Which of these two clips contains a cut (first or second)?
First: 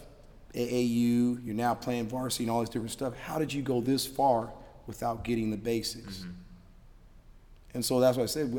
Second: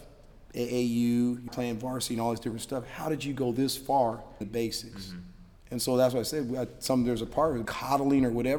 second